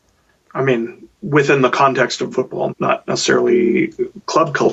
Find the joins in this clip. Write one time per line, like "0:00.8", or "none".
0:01.1
0:02.3
0:02.7